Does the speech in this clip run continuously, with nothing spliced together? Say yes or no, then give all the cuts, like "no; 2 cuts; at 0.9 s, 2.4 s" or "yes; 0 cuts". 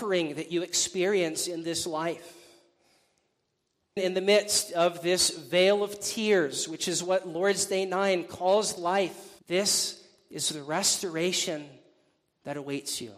no; 3 cuts; at 4.0 s, 8.8 s, 9.4 s